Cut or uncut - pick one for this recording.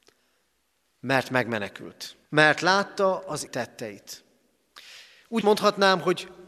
cut